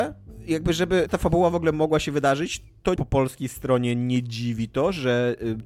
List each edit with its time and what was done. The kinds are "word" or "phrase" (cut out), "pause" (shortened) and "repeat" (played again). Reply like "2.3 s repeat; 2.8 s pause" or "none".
1.1 s word; 3.0 s word